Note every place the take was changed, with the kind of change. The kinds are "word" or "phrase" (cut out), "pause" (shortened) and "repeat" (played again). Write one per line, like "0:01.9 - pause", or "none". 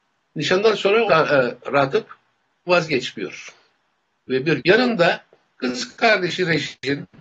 0:01.1 - word
0:02.7 - word
0:04.6 - word